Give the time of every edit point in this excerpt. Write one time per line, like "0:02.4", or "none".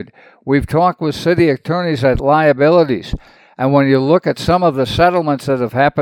0:02.2